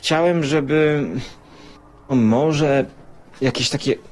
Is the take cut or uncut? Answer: cut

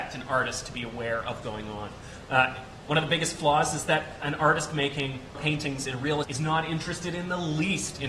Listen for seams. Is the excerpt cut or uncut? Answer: cut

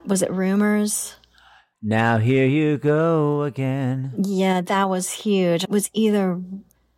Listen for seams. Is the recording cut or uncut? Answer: cut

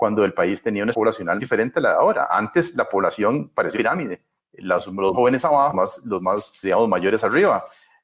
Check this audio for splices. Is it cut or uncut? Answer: cut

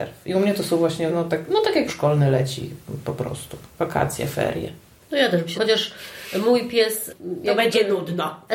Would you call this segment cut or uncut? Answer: cut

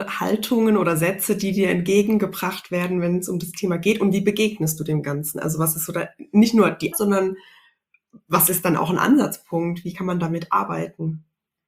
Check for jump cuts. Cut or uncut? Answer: cut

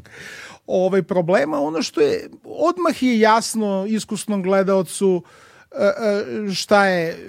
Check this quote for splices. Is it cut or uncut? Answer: uncut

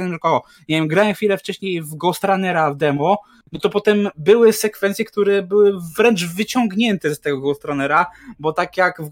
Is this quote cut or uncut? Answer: uncut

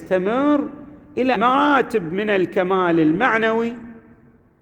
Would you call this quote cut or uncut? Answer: cut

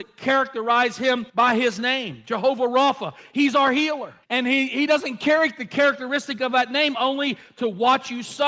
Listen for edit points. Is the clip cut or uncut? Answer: cut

